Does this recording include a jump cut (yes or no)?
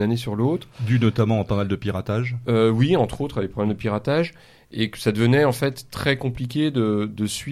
no